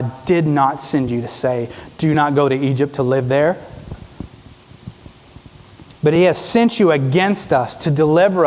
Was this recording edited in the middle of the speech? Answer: no; 0 cuts

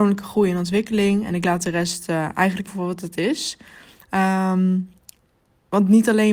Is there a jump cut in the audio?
yes; 1 cut; at 2.7 s

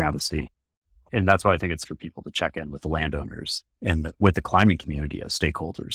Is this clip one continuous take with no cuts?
no; 1 cut; at 1.8 s

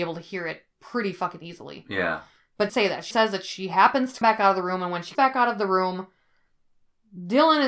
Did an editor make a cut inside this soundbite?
yes; 4 cuts; at 2.7 s, 3.1 s, 4.2 s, 5.1 s

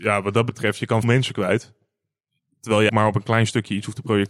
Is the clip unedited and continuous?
no; 2 cuts; at 1.0 s, 2.9 s

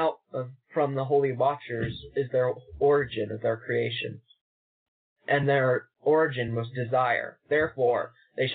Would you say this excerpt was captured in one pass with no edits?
yes; 0 cuts

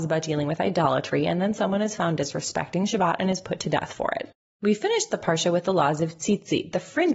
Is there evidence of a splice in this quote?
no; 0 cuts

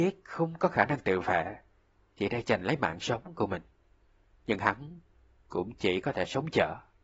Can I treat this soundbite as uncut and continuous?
yes; 0 cuts

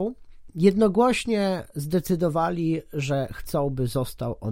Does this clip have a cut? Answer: no; 0 cuts

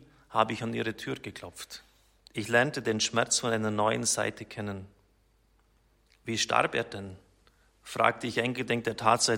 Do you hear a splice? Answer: yes; 1 cut; at 2.2 s

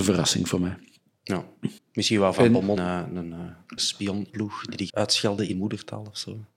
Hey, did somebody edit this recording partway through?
yes; 6 cuts; at 1.8 s, 2.8 s, 3.8 s, 4.3 s, 4.9 s, 5.5 s

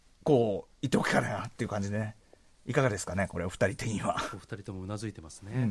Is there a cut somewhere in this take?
no; 0 cuts

